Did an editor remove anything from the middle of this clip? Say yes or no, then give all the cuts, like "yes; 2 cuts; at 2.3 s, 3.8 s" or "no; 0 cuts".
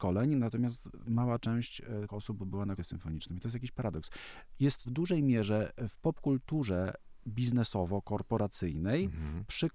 yes; 3 cuts; at 2.1 s, 2.8 s, 4.8 s